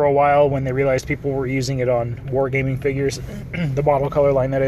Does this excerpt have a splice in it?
no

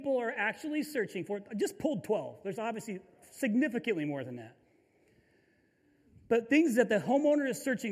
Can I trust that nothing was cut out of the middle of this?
yes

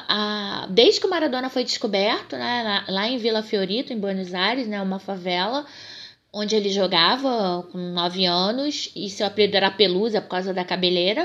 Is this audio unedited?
yes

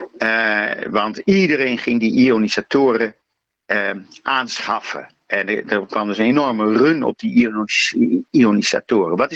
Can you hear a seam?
no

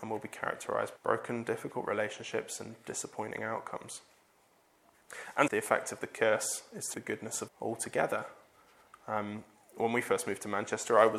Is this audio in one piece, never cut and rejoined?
no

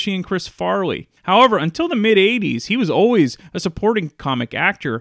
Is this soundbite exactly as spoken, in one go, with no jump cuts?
no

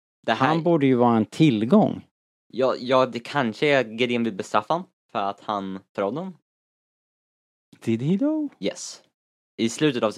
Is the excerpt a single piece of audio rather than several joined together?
yes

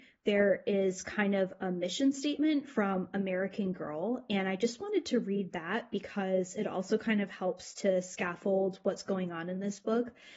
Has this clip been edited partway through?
no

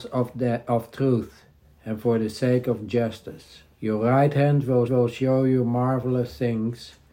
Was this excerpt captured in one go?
no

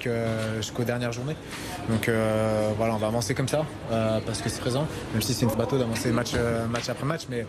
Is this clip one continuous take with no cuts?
no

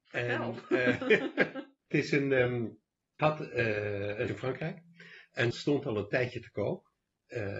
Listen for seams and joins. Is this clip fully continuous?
no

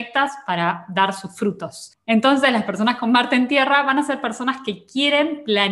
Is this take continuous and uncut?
yes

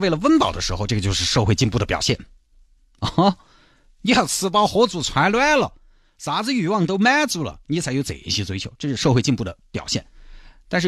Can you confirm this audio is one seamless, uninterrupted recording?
yes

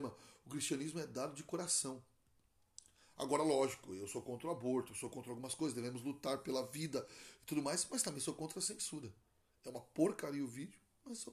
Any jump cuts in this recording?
no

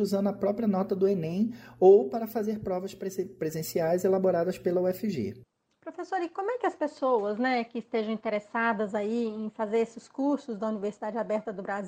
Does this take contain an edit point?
yes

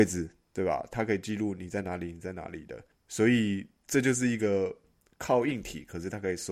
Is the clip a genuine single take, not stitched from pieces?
yes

